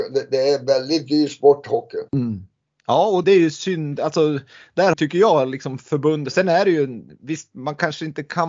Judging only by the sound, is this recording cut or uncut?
cut